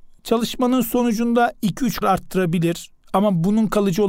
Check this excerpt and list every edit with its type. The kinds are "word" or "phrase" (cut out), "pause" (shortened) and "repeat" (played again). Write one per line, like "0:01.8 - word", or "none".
0:02.0 - phrase